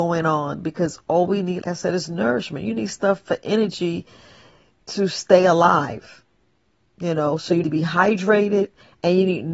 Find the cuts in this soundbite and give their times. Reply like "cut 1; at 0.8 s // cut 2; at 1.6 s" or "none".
cut 1; at 1.6 s // cut 2; at 7.6 s